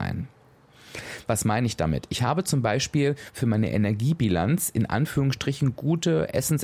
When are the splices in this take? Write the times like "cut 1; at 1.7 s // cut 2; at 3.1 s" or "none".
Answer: none